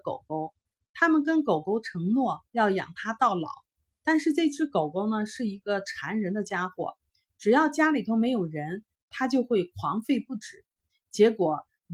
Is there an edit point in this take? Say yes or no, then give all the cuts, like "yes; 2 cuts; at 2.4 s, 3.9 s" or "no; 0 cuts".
yes; 1 cut; at 2.5 s